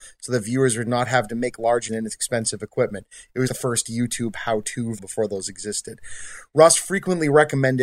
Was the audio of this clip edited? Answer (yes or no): yes